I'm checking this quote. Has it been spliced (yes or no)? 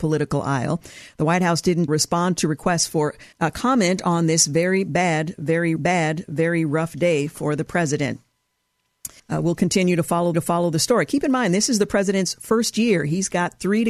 yes